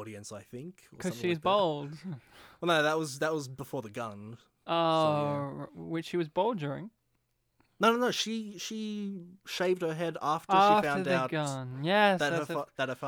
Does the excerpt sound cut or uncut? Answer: uncut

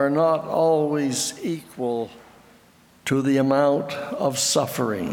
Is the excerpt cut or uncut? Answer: uncut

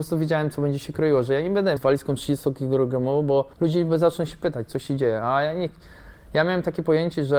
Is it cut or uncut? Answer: cut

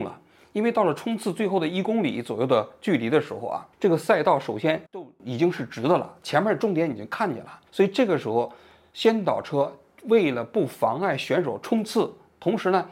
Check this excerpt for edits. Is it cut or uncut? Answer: cut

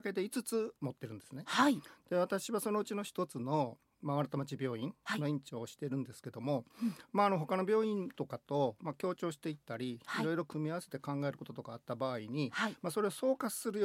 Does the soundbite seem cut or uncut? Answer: uncut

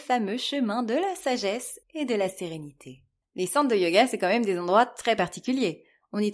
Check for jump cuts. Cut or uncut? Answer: cut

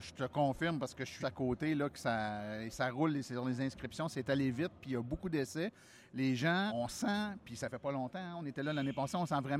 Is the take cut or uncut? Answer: cut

